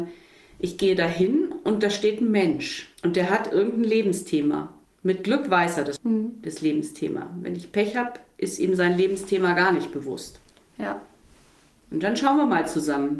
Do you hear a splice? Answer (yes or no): yes